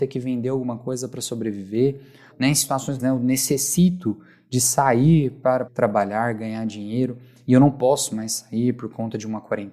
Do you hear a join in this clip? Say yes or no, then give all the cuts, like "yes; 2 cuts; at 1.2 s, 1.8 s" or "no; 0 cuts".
yes; 3 cuts; at 2.3 s, 3.0 s, 5.7 s